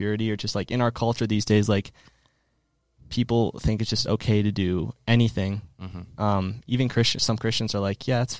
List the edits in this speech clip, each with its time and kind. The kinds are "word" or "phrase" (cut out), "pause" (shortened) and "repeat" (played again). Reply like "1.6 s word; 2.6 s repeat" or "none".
none